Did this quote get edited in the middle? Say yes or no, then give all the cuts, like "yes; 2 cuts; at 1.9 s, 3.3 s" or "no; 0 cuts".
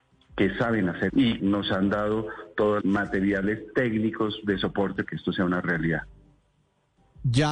yes; 4 cuts; at 1.1 s, 1.4 s, 2.8 s, 5.1 s